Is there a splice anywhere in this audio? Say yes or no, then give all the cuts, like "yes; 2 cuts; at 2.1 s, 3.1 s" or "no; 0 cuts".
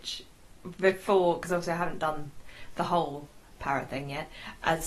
no; 0 cuts